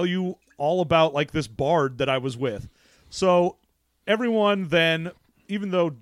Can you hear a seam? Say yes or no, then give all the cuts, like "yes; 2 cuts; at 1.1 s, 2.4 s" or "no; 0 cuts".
no; 0 cuts